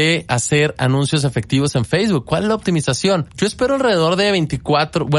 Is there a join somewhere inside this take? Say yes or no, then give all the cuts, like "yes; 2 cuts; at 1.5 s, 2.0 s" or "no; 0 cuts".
yes; 1 cut; at 3.3 s